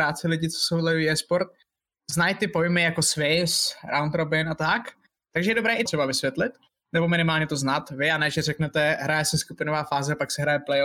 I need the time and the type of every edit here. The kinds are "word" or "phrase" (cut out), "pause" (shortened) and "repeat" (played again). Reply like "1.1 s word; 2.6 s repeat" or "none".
5.9 s word